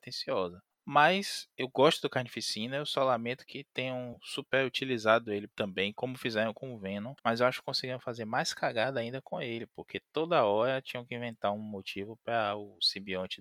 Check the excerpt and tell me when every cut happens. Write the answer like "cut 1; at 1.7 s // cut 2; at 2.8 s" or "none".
cut 1; at 5.5 s // cut 2; at 7.2 s